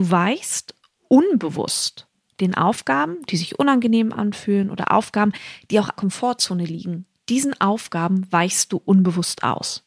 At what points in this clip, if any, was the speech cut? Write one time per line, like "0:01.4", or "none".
0:06.0